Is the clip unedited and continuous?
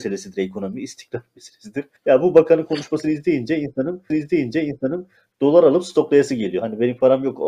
no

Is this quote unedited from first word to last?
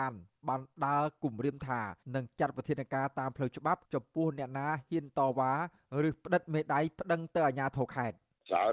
no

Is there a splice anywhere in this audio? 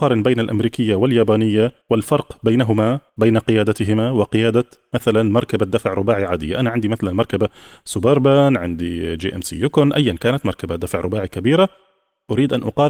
yes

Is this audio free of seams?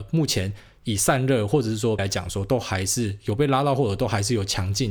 no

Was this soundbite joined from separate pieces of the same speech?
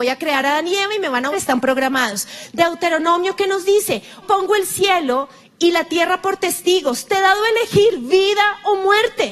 yes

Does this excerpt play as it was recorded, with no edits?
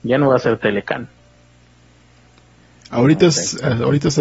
yes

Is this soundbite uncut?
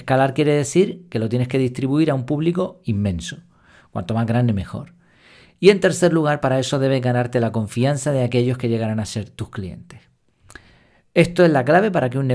yes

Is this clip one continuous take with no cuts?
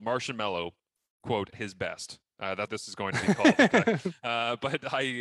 no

